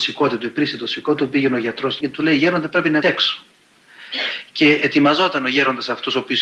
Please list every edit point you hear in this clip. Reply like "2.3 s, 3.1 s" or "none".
2.0 s, 3.0 s